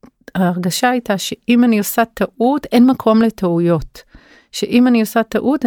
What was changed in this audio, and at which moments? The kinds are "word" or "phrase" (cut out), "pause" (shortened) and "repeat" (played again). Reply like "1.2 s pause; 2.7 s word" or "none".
none